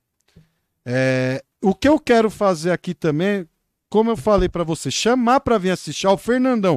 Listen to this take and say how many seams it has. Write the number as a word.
zero